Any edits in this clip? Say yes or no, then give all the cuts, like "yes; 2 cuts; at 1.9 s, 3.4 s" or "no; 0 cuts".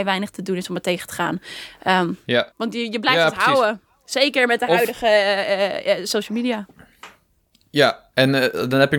yes; 1 cut; at 2.5 s